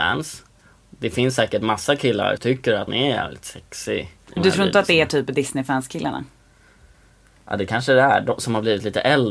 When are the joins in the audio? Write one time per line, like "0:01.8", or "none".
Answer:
0:02.4
0:02.9
0:04.4